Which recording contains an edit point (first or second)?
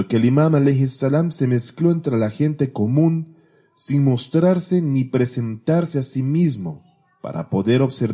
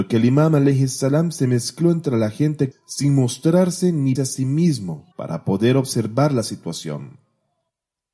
second